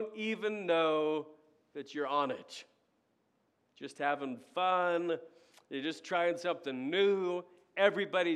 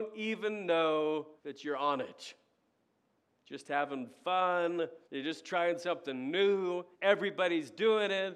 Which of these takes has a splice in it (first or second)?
second